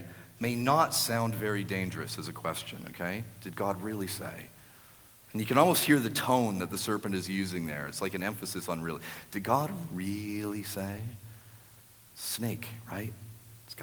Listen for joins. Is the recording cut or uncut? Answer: uncut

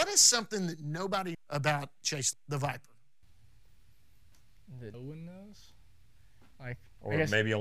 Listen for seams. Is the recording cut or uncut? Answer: cut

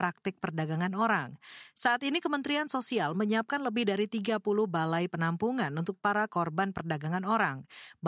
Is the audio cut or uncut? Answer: uncut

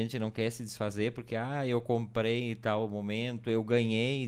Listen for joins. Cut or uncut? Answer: uncut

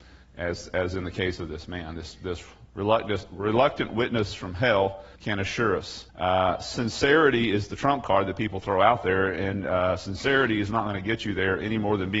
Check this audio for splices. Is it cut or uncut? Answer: cut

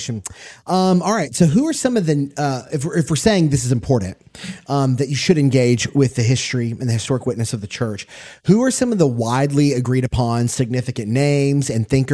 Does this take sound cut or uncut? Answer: uncut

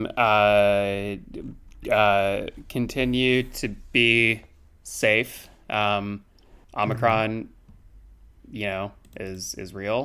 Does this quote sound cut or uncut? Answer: cut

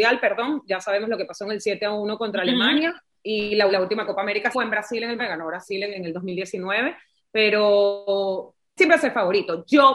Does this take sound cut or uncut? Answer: cut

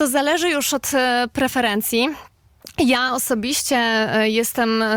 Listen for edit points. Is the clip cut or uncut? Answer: uncut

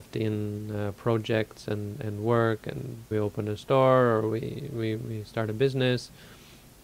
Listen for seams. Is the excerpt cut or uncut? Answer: cut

